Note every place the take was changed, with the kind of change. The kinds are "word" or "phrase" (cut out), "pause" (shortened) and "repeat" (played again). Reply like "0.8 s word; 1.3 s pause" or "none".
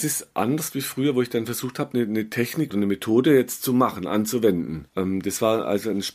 2.7 s phrase; 4.9 s pause